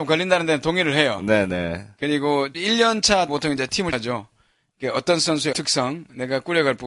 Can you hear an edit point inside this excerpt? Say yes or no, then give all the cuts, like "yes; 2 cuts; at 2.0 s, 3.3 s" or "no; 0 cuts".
yes; 4 cuts; at 2.5 s, 3.3 s, 3.9 s, 5.5 s